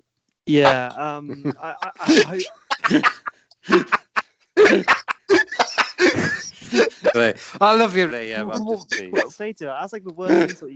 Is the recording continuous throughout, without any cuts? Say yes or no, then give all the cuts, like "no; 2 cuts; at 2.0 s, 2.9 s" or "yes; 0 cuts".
no; 4 cuts; at 2.8 s, 7.1 s, 8.1 s, 9.3 s